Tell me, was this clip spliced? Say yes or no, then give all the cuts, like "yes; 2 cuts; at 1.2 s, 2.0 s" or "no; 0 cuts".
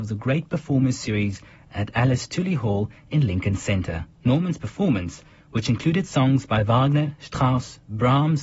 yes; 1 cut; at 4.1 s